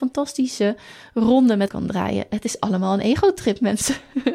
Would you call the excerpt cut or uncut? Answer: cut